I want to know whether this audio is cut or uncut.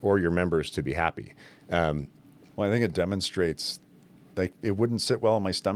uncut